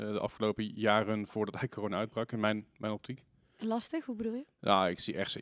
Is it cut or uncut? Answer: uncut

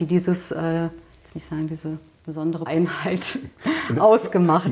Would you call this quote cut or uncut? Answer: cut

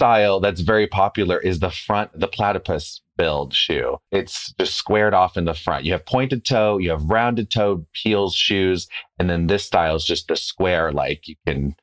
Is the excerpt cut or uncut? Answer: uncut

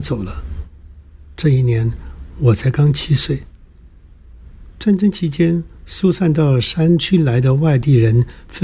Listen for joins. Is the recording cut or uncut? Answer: uncut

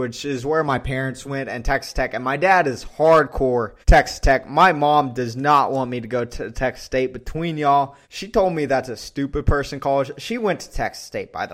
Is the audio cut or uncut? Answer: cut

